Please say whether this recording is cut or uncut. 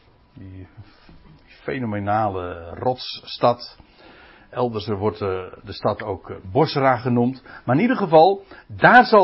uncut